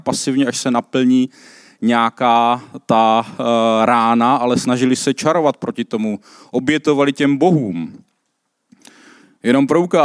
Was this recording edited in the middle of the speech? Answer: no; 0 cuts

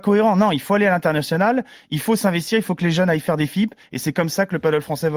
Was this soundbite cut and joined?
no; 0 cuts

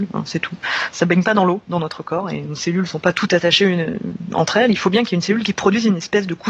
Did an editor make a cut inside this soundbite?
no; 0 cuts

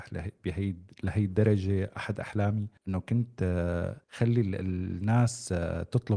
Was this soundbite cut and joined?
yes; 2 cuts; at 2.8 s, 4.0 s

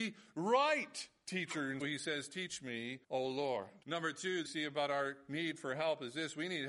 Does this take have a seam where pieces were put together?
yes; 4 cuts; at 1.8 s, 3.0 s, 3.8 s, 4.4 s

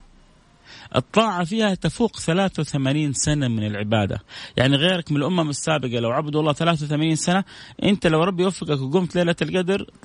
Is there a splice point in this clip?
no; 0 cuts

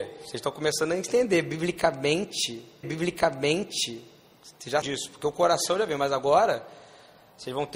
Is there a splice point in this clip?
yes; 2 cuts; at 2.8 s, 4.8 s

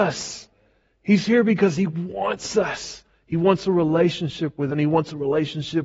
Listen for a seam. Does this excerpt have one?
yes; 1 cut; at 4.7 s

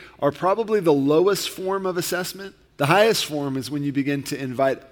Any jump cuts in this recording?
yes; 1 cut; at 2.7 s

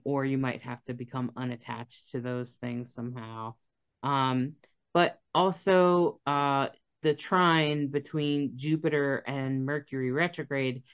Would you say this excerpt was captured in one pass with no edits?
yes; 0 cuts

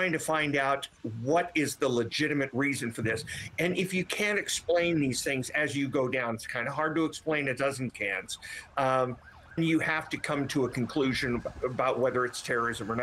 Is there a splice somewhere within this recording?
yes; 2 cuts; at 7.9 s, 9.6 s

